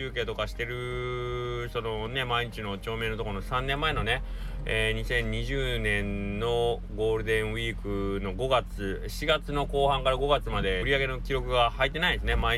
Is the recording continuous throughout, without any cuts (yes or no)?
no